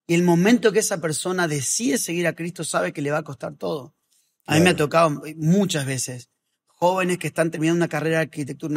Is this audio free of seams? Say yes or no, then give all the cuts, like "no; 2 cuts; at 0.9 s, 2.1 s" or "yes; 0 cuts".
yes; 0 cuts